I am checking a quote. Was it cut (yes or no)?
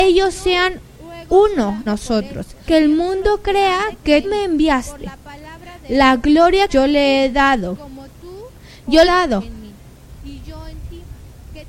yes